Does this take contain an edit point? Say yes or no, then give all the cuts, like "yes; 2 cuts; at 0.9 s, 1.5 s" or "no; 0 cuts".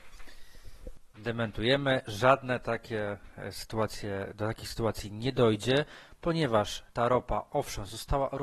yes; 1 cut; at 1.1 s